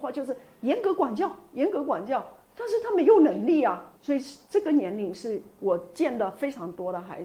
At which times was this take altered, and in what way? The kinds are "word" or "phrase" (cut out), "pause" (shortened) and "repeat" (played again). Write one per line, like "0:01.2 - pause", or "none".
0:02.4 - pause
0:04.0 - pause